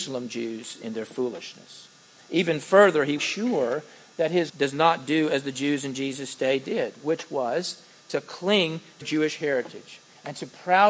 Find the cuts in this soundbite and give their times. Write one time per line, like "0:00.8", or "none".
0:02.0
0:03.2
0:04.5
0:09.0